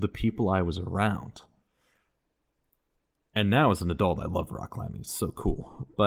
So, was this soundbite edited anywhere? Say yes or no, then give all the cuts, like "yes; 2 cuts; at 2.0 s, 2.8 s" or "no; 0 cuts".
no; 0 cuts